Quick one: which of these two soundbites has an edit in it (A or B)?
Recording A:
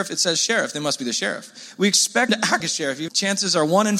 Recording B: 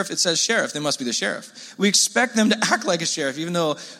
A